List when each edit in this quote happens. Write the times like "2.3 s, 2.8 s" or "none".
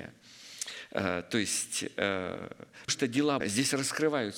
2.9 s, 3.4 s